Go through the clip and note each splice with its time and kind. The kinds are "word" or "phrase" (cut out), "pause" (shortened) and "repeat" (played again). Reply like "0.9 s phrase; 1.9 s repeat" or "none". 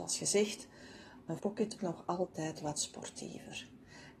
1.4 s word; 1.8 s word